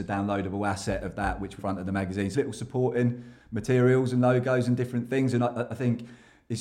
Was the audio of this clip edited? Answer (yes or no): yes